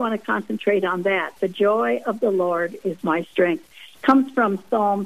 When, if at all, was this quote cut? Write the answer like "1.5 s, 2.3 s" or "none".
none